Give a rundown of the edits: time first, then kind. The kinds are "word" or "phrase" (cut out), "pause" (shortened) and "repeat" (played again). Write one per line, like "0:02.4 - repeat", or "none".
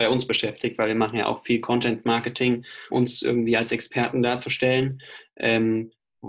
0:02.9 - word

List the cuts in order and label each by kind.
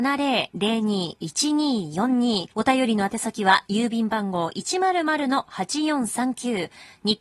0:02.5 - pause

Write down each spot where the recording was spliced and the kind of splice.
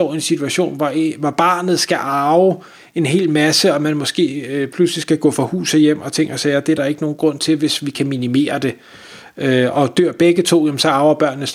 none

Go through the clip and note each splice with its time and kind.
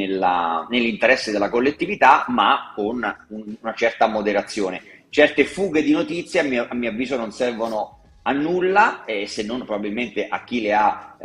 none

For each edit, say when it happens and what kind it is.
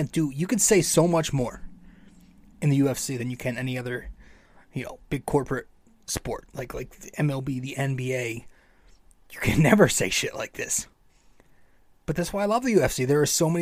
none

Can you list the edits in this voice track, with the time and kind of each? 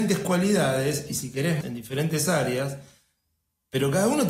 0:01.6 - word

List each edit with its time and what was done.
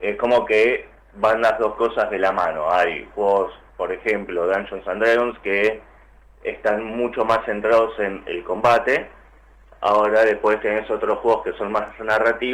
none

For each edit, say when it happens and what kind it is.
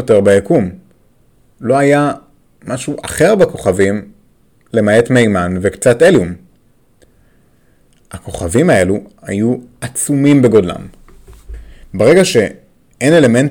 none

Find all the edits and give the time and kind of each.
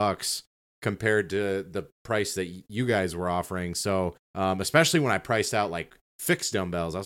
0:01.9 - pause
0:04.2 - pause

